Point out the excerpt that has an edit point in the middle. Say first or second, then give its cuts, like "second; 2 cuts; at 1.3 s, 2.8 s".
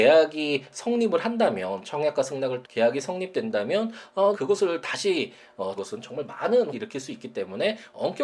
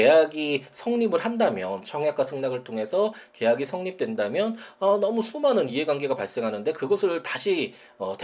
first; 4 cuts; at 2.6 s, 4.3 s, 5.8 s, 6.7 s